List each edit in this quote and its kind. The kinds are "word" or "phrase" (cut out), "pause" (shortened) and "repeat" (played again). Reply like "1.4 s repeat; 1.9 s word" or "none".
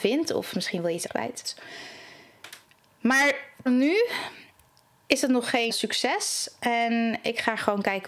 1.1 s word; 3.7 s word; 5.7 s word